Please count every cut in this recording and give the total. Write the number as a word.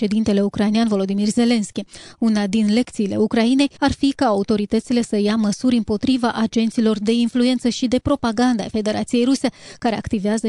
one